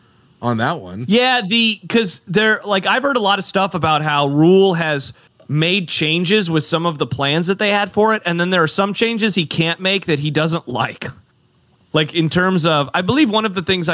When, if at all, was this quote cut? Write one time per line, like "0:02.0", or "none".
none